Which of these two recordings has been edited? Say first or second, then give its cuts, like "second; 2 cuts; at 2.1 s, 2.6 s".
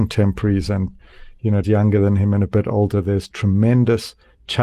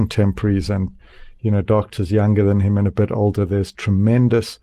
first; 1 cut; at 1.6 s